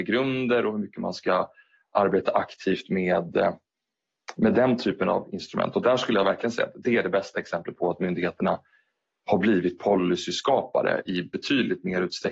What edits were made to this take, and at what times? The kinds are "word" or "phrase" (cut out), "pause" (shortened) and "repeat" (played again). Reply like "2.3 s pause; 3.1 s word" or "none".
none